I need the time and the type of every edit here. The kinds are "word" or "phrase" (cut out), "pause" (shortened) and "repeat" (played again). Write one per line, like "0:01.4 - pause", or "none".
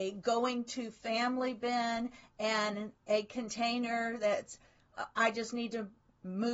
0:03.0 - pause